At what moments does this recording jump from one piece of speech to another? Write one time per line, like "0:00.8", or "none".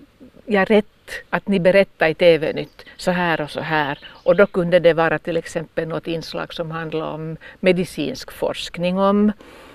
0:01.2